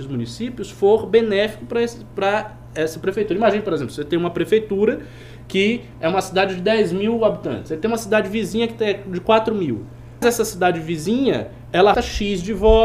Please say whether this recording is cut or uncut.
cut